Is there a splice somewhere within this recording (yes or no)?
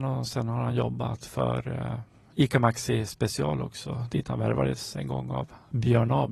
no